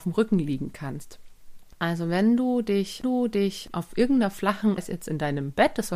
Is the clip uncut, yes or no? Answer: no